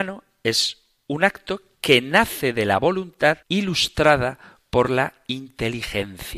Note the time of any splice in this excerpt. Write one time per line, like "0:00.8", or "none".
0:03.4